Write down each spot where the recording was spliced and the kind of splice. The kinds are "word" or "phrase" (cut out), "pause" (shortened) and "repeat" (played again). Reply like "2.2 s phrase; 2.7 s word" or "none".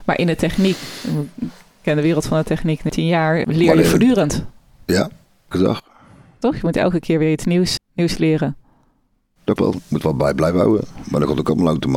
2.9 s word; 3.4 s word; 5.5 s word; 7.8 s word; 9.6 s word